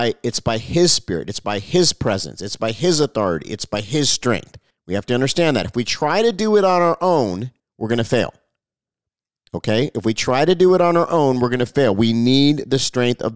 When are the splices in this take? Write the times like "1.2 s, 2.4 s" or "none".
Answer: 4.7 s, 7.6 s